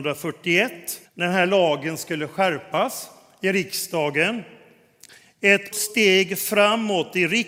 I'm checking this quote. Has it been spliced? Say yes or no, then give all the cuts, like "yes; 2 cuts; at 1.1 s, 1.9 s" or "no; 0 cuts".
yes; 2 cuts; at 1.0 s, 5.7 s